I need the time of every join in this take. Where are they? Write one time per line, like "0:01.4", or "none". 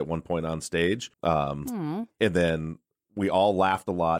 0:01.1